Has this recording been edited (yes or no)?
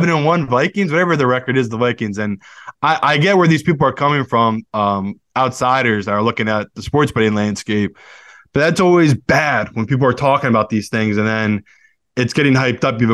no